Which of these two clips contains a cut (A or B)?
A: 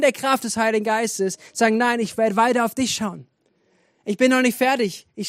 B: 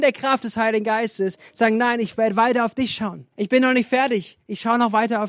B